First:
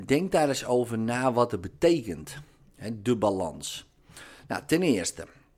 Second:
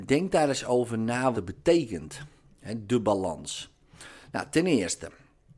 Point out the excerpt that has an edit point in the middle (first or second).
second